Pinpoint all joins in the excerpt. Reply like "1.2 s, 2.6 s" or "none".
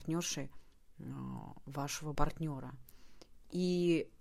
2.1 s